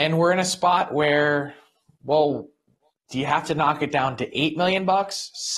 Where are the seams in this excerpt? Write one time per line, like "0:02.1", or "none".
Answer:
none